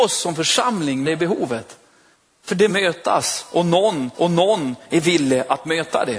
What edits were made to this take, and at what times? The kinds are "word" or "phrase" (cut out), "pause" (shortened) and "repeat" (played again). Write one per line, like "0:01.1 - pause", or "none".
0:01.0 - word
0:02.1 - pause
0:02.7 - word
0:04.1 - repeat